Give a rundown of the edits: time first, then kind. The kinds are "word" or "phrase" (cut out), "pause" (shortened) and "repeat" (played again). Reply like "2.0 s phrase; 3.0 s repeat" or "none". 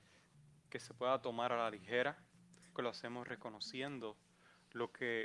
2.7 s word